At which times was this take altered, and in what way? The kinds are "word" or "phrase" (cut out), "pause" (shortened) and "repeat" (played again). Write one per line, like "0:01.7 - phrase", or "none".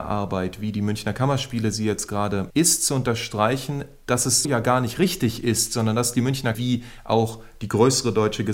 0:02.5 - word
0:04.4 - word
0:06.5 - word